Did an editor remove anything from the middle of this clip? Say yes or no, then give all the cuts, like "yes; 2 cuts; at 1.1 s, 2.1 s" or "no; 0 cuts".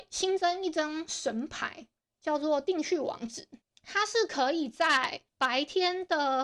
yes; 3 cuts; at 2.0 s, 3.6 s, 5.3 s